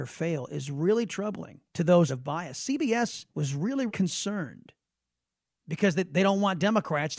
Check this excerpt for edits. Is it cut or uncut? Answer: cut